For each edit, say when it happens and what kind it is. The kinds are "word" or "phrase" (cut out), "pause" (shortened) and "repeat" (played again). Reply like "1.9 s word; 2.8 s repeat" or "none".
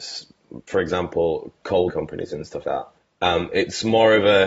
1.9 s word; 2.6 s word; 3.0 s pause